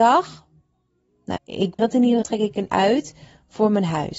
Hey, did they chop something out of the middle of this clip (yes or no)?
yes